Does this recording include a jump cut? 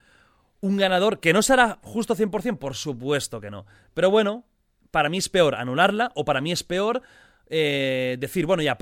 no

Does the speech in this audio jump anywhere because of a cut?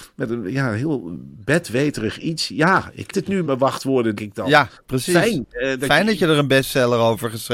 yes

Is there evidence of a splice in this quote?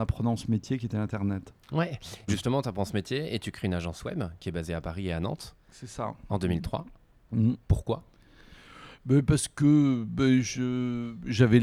yes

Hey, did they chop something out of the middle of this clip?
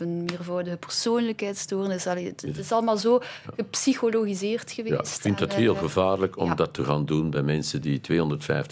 no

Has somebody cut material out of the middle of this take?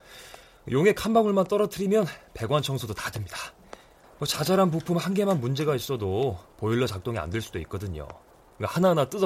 no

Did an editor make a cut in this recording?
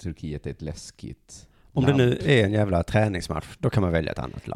no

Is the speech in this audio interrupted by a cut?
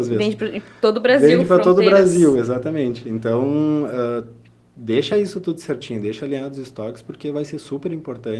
no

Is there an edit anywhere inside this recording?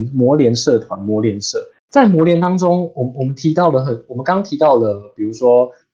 yes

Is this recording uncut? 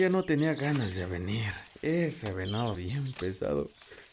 no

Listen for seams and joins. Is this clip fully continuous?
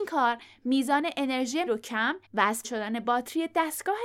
no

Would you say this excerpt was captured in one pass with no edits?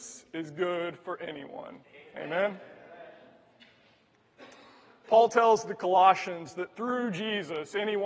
yes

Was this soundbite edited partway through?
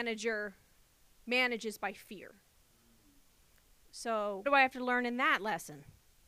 yes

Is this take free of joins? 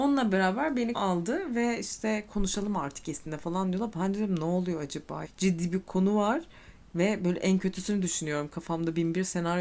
no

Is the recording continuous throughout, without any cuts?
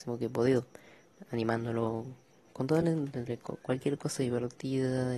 yes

